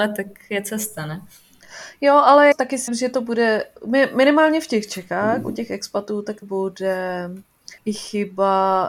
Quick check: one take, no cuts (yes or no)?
no